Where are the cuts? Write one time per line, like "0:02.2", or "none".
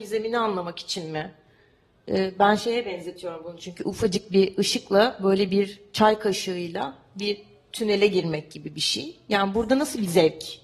none

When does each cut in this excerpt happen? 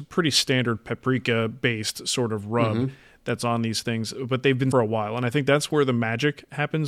0:04.7

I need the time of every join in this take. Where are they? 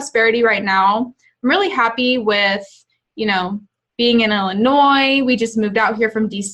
none

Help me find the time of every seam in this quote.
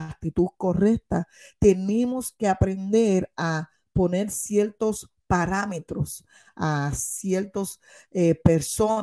none

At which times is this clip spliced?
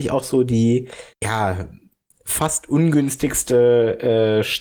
0:01.1

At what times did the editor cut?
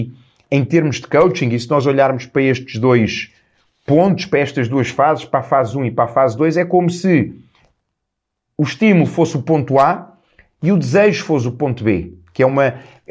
none

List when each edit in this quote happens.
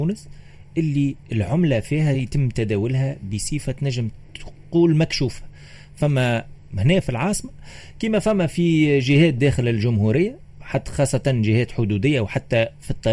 none

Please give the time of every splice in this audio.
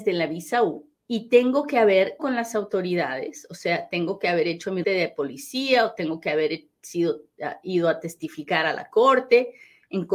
0:00.9
0:02.2
0:04.8

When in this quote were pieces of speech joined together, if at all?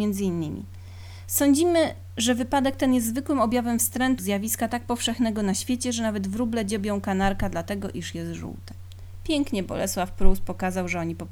0:04.2

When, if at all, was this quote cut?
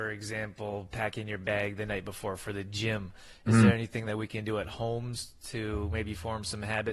none

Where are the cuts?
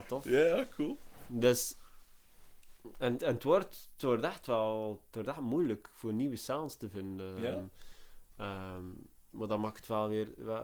0:03.2

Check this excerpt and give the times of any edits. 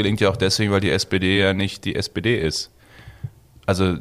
none

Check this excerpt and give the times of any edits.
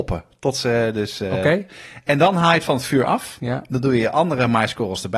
none

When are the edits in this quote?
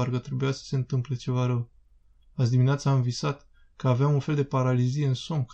none

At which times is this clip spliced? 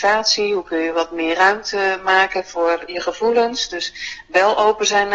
none

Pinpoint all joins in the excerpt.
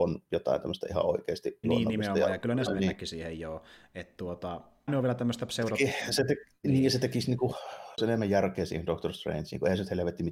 0:01.6
0:02.7
0:04.9
0:07.9

